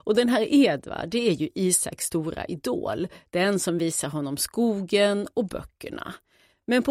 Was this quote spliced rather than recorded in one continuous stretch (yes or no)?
no